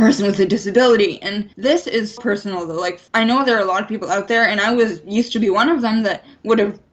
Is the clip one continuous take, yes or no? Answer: no